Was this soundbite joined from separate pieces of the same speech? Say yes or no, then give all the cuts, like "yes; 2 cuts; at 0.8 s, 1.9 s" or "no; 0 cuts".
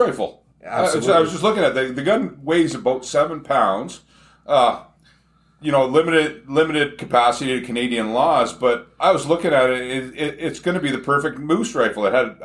no; 0 cuts